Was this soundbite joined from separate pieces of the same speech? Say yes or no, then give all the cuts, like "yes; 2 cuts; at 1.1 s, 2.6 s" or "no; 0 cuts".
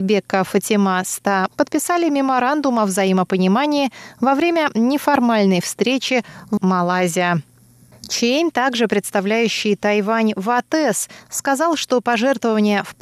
yes; 2 cuts; at 1.5 s, 6.6 s